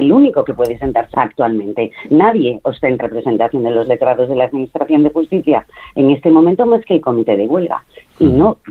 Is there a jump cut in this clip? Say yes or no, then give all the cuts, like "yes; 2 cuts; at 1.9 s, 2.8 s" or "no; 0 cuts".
yes; 2 cuts; at 1.1 s, 3.0 s